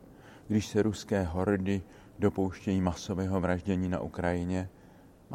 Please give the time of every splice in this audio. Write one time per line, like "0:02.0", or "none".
none